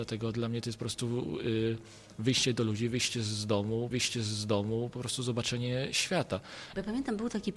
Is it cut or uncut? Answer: cut